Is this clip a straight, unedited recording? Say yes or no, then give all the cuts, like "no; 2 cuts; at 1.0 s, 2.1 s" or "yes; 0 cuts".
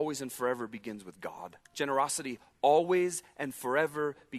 no; 1 cut; at 1.6 s